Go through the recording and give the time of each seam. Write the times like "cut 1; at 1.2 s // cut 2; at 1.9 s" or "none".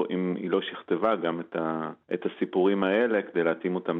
cut 1; at 2.0 s